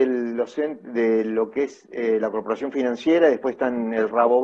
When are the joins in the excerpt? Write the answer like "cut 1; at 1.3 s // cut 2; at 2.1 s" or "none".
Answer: none